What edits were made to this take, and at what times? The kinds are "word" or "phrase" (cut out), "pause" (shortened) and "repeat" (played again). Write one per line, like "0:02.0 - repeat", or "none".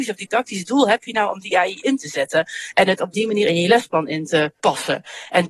none